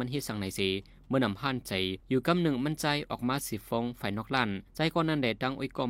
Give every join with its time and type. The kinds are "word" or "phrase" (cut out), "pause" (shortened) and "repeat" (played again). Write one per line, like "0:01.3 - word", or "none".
0:02.0 - pause
0:04.7 - pause